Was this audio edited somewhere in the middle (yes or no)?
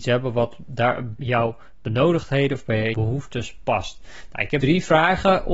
yes